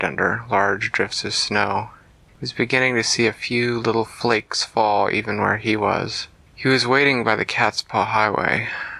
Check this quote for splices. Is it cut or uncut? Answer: uncut